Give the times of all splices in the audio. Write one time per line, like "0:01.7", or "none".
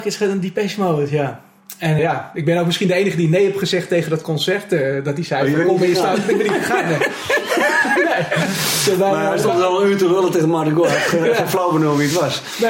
0:02.0